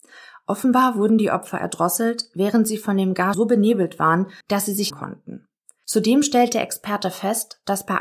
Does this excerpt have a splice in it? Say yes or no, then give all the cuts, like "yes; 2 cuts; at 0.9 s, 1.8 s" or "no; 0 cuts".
yes; 3 cuts; at 3.3 s, 4.4 s, 4.9 s